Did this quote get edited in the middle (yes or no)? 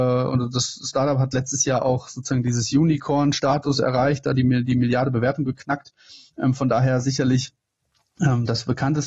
no